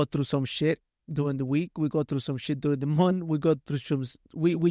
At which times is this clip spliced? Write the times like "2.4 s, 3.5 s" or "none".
none